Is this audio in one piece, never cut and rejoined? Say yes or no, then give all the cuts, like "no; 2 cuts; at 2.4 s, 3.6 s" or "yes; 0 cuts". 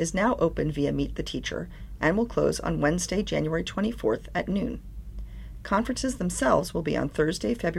yes; 0 cuts